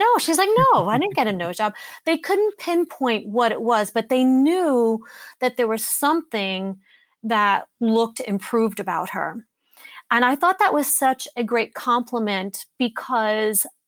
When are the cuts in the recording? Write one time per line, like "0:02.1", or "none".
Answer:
none